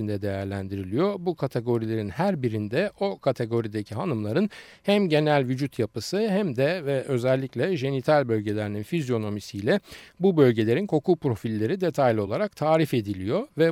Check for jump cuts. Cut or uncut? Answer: uncut